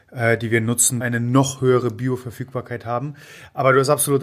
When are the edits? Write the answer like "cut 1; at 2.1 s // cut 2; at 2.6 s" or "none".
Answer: cut 1; at 1.0 s